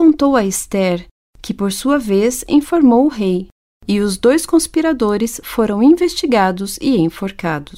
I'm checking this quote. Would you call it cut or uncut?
uncut